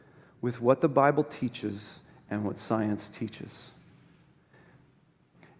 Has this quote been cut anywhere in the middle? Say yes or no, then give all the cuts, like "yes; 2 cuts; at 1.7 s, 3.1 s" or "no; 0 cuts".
no; 0 cuts